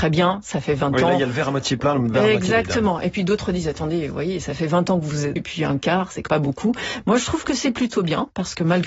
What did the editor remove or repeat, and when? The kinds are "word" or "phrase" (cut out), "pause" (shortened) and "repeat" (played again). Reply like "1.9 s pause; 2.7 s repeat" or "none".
5.4 s phrase; 6.3 s word